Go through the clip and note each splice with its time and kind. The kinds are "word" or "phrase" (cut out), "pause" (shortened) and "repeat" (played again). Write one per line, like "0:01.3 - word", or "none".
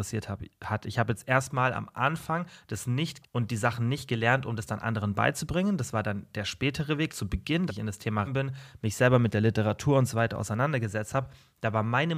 0:03.2 - word
0:07.1 - word
0:07.7 - word
0:08.2 - word